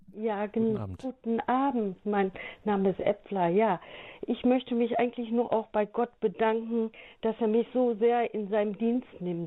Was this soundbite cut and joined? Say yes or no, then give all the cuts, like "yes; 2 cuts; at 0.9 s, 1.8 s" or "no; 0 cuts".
no; 0 cuts